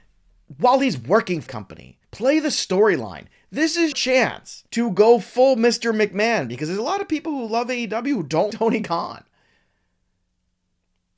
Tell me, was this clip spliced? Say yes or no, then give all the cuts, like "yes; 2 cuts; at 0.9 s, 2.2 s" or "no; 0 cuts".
yes; 5 cuts; at 1.5 s, 2.0 s, 3.9 s, 4.7 s, 8.5 s